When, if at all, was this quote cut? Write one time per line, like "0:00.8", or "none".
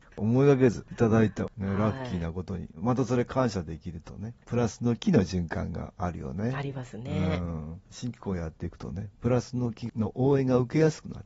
0:04.4